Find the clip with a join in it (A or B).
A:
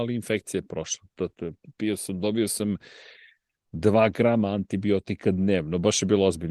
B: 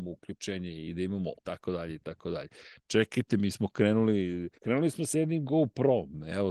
B